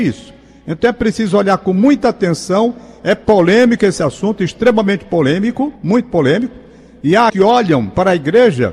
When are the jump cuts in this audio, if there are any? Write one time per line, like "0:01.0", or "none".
0:05.8
0:07.3